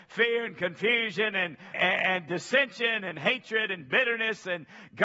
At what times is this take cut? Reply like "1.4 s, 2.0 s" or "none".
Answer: 1.7 s